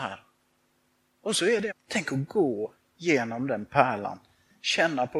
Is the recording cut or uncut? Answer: cut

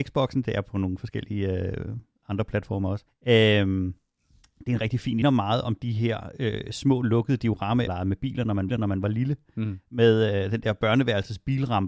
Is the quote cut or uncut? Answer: cut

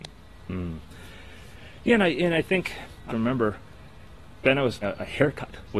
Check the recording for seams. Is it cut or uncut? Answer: cut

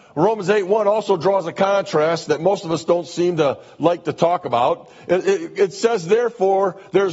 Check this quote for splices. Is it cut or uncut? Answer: uncut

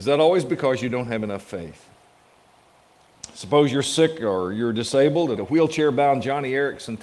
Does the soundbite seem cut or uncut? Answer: cut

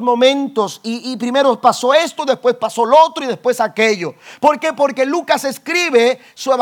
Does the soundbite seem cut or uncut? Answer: uncut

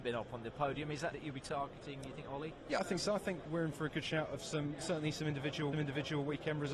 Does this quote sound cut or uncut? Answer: cut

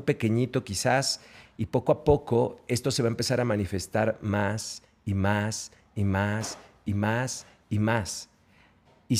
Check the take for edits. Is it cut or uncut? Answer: uncut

